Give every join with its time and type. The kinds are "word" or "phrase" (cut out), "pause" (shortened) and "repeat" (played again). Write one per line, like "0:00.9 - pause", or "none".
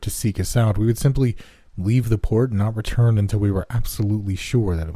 none